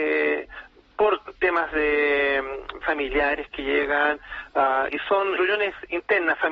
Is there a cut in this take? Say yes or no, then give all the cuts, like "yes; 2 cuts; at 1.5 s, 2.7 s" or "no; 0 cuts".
yes; 3 cuts; at 2.8 s, 4.9 s, 5.4 s